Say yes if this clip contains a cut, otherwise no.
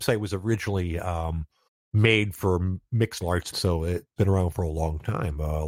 yes